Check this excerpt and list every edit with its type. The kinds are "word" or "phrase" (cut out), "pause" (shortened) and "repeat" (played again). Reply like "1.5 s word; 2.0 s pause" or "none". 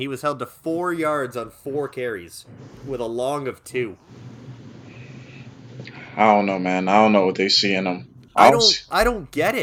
none